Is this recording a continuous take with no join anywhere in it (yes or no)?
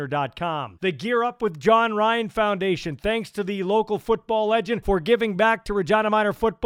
yes